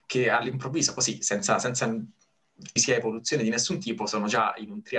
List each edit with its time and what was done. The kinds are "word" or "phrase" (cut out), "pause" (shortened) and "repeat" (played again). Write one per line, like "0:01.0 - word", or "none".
0:02.8 - word